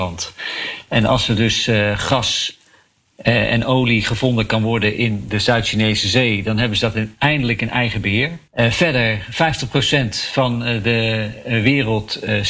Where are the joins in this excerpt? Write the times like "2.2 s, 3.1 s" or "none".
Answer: none